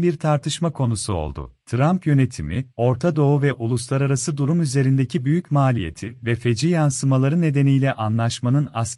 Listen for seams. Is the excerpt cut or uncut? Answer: cut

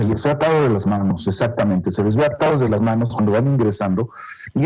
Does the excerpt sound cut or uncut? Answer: uncut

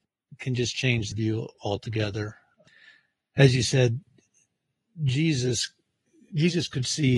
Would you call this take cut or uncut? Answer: cut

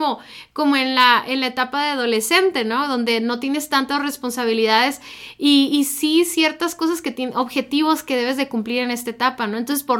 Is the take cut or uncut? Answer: uncut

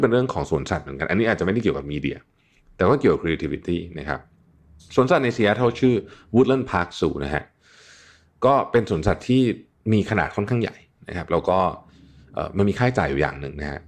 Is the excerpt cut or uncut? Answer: uncut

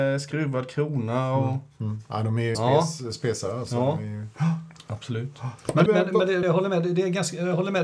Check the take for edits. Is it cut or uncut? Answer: cut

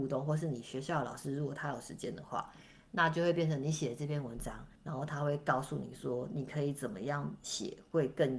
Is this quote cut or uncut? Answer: cut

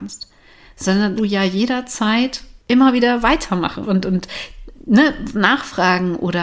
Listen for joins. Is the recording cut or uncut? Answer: cut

